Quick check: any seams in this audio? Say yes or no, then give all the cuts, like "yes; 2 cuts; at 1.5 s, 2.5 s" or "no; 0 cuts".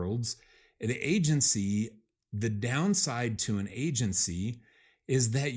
no; 0 cuts